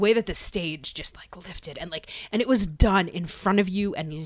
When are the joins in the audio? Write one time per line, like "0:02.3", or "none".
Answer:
none